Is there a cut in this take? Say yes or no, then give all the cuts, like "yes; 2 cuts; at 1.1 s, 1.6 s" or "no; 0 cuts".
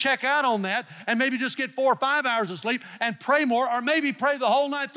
no; 0 cuts